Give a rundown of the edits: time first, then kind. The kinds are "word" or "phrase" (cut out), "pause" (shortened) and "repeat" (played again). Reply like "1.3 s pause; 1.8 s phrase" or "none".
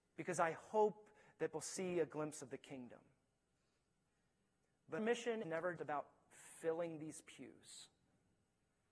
1.5 s word; 5.0 s word; 5.4 s word; 5.8 s word